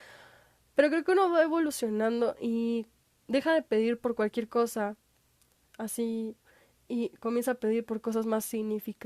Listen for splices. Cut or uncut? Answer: uncut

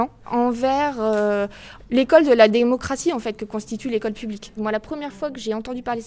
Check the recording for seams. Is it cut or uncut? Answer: uncut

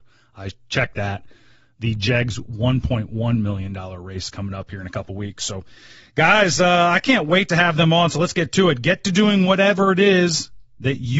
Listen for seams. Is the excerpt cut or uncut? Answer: uncut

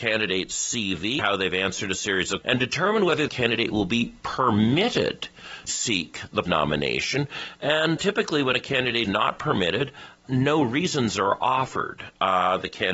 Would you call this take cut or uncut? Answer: cut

